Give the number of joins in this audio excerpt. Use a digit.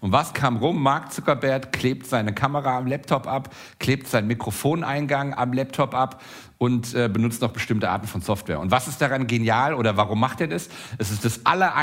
0